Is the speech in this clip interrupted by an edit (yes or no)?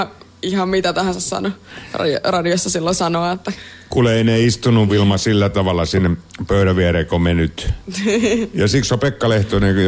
no